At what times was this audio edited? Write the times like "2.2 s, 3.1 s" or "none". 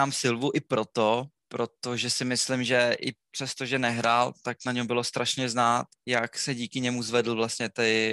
1.4 s, 5.9 s